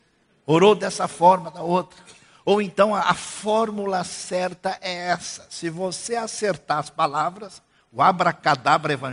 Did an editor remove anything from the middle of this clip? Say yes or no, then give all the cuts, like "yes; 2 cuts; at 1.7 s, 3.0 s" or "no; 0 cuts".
no; 0 cuts